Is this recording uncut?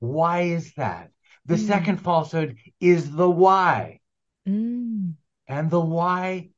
yes; 0 cuts

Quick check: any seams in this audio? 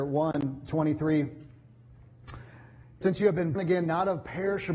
yes; 2 cuts; at 3.0 s, 3.5 s

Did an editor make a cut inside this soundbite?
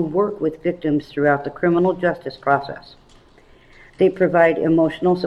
no; 0 cuts

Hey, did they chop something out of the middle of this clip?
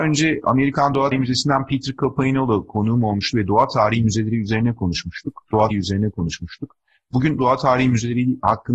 yes; 3 cuts; at 1.1 s, 5.7 s, 7.4 s

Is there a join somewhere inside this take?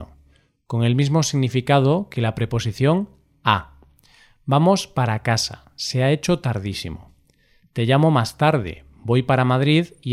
no; 0 cuts

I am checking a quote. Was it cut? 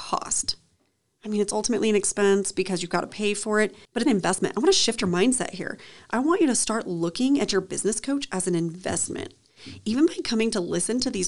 yes; 1 cut; at 4.1 s

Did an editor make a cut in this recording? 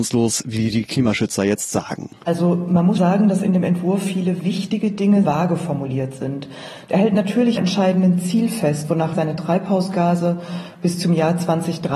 yes; 4 cuts; at 3.0 s, 5.2 s, 7.6 s, 9.1 s

